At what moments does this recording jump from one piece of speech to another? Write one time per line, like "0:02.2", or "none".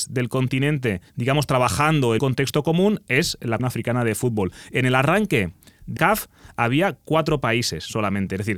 0:01.1
0:02.2
0:03.6
0:06.0